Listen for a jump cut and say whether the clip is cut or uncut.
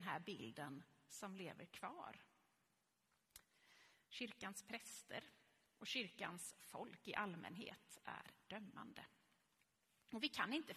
uncut